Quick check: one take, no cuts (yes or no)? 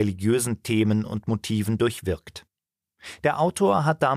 yes